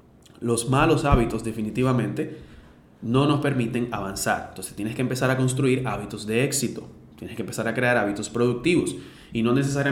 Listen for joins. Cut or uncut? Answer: uncut